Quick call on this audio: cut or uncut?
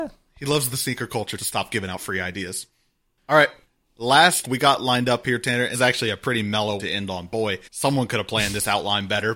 cut